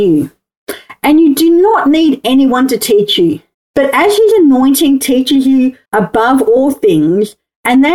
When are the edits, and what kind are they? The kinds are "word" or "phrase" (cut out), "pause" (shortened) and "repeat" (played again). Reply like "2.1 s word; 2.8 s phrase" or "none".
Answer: 3.5 s pause; 5.8 s pause